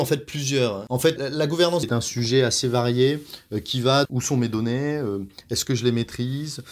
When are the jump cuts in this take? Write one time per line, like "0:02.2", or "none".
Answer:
0:01.2
0:01.8
0:04.0